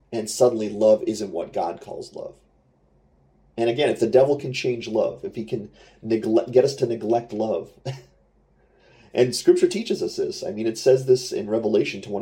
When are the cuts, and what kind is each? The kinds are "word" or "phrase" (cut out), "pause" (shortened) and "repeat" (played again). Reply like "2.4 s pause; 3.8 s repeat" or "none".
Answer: none